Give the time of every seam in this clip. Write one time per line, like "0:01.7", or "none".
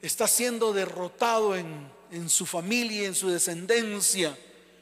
none